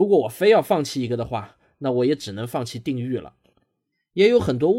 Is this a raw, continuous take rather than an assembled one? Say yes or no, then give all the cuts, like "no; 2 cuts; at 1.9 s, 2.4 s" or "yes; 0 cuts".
yes; 0 cuts